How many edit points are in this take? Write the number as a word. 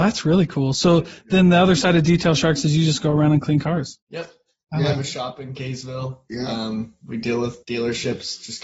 two